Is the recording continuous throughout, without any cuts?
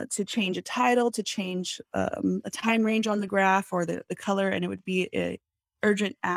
yes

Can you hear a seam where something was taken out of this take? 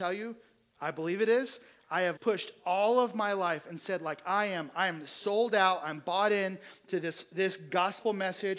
yes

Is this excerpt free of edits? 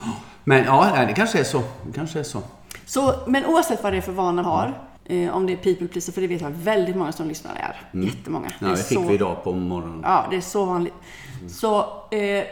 no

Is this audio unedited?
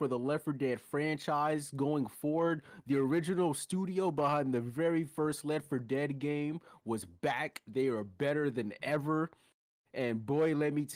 yes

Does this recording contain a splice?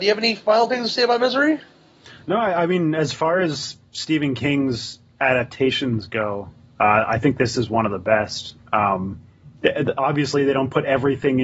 no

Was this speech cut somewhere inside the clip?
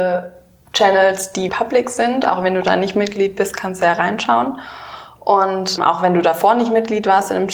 yes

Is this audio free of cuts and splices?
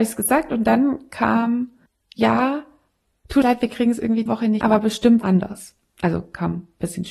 no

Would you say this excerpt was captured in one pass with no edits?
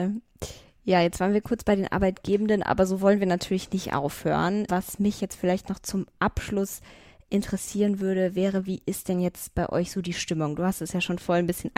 no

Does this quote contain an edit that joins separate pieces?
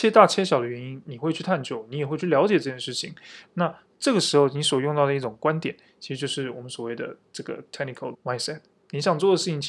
yes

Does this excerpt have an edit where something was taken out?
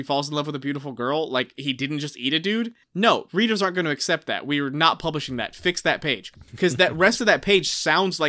yes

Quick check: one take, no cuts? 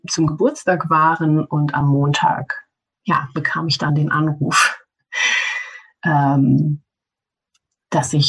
yes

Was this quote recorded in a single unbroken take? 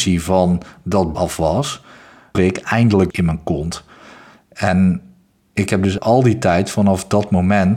no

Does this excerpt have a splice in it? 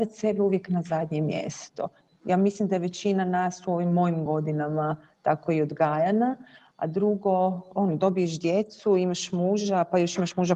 no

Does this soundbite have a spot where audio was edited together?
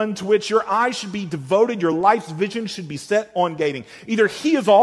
no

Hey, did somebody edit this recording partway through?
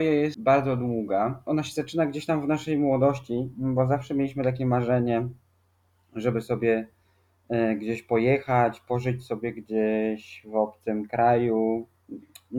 no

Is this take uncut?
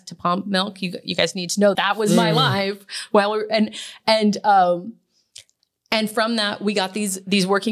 no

